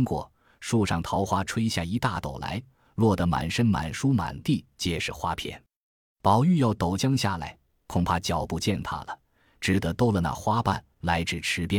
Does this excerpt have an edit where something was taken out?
no; 0 cuts

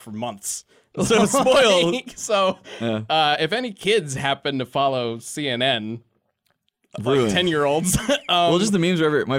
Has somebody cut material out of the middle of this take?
no; 0 cuts

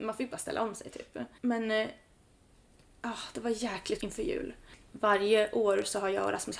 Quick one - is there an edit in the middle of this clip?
yes; 2 cuts; at 1.4 s, 4.0 s

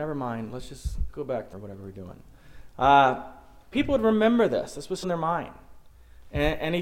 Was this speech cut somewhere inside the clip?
yes; 4 cuts; at 1.1 s, 1.5 s, 3.7 s, 5.0 s

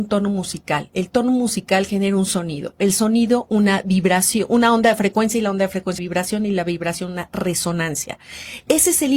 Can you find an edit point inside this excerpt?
yes; 1 cut; at 6.0 s

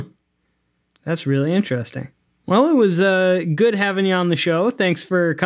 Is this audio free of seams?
yes; 0 cuts

